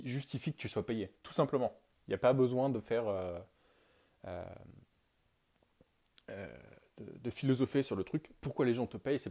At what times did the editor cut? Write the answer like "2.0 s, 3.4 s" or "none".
none